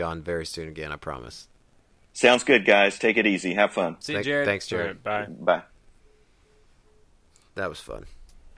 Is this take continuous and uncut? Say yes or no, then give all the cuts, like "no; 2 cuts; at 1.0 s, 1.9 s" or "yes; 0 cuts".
yes; 0 cuts